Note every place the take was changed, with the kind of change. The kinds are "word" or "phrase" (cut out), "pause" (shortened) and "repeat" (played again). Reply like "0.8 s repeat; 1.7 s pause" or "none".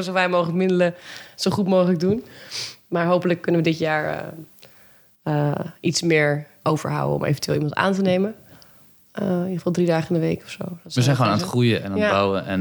none